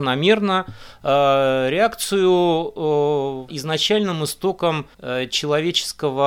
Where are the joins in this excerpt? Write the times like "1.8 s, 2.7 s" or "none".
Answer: 3.5 s, 4.9 s